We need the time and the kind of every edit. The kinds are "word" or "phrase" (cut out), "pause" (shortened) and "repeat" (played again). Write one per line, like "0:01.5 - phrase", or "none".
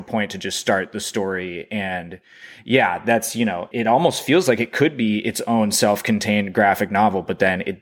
0:03.7 - word